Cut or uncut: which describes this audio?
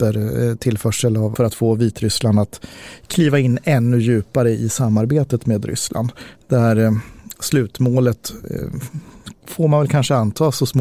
cut